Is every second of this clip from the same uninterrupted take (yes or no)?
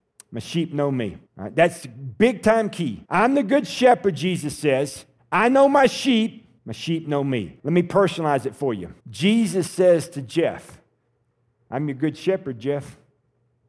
no